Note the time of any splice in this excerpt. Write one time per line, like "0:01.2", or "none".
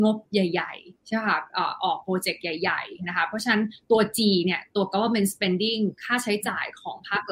none